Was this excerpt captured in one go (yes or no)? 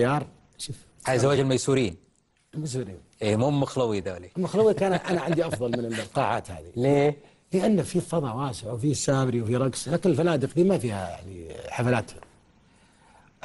yes